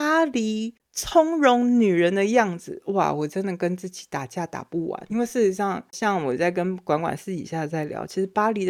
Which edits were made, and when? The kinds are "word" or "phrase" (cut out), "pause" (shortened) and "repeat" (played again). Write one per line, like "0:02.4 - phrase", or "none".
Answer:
0:05.1 - word